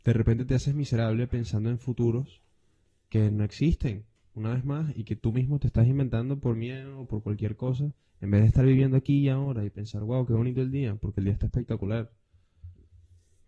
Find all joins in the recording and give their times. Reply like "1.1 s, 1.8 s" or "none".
none